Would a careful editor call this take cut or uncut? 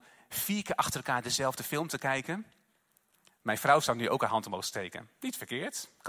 uncut